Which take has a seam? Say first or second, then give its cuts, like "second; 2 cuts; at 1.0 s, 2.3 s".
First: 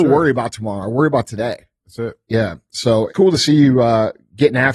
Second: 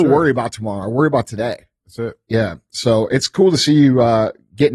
first; 1 cut; at 3.1 s